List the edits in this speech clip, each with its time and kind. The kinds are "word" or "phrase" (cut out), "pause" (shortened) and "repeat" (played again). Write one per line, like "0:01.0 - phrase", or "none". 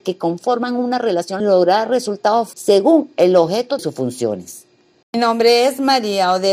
0:01.4 - phrase
0:02.5 - phrase
0:03.8 - word
0:04.9 - pause